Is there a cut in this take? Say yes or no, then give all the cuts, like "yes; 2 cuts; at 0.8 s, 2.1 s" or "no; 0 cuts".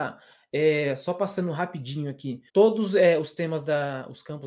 yes; 1 cut; at 2.5 s